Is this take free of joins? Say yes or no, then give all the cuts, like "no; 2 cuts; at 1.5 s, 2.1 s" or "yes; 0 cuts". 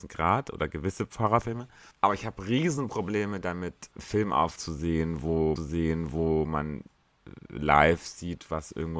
no; 4 cuts; at 1.9 s, 3.9 s, 4.6 s, 5.6 s